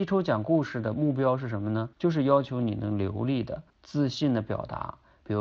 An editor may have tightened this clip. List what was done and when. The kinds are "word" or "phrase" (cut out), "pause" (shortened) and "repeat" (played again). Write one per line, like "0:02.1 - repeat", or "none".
0:01.9 - pause
0:03.7 - pause